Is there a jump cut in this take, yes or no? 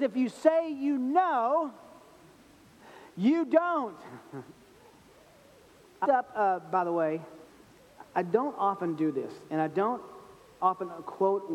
yes